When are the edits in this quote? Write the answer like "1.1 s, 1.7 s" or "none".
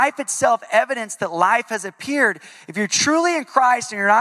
none